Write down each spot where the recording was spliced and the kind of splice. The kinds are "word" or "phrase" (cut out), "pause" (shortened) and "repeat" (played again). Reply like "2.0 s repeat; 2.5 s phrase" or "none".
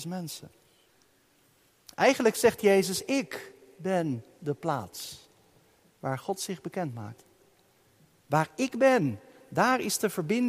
none